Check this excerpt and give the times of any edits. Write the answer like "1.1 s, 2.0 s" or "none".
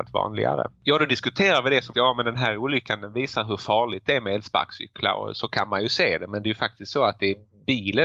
1.9 s

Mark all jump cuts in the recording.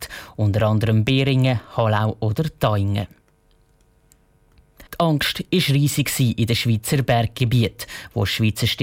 4.9 s

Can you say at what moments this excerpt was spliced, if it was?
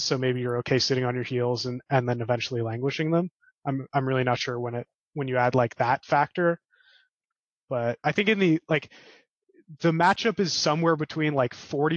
none

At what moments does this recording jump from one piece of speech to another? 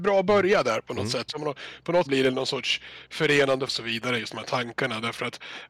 1.3 s, 2.1 s, 3.7 s

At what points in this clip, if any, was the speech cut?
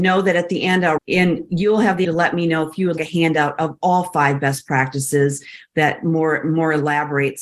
1.0 s, 2.0 s, 3.0 s

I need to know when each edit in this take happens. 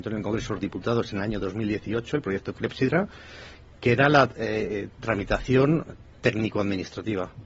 none

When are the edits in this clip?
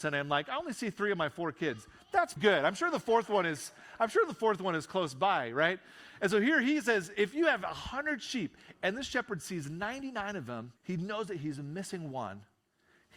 2.4 s, 10.8 s

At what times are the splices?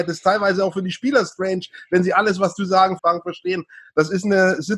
3.0 s

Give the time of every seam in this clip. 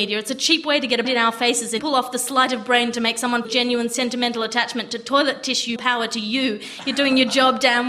1.0 s, 1.8 s, 3.4 s, 5.8 s

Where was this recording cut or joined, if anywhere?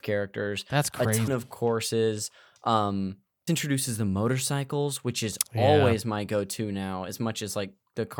1.3 s, 3.5 s

